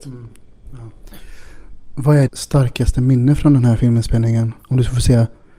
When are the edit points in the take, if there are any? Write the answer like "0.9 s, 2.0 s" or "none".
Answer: 2.3 s